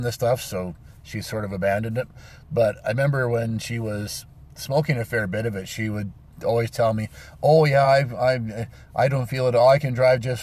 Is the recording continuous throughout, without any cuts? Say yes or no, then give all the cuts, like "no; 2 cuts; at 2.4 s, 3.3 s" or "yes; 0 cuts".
yes; 0 cuts